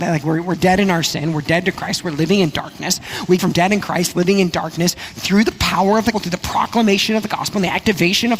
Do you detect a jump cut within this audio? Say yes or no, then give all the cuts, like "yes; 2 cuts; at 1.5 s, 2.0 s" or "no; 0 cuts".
yes; 2 cuts; at 3.4 s, 6.1 s